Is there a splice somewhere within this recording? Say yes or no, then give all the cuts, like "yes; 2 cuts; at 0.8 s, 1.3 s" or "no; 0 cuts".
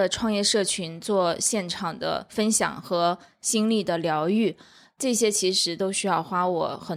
no; 0 cuts